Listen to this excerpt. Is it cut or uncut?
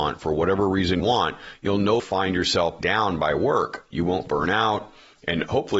cut